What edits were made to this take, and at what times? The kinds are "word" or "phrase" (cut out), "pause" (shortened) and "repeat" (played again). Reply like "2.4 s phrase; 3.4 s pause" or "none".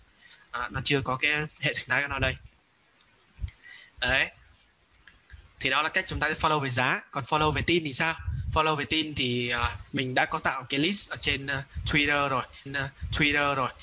12.7 s repeat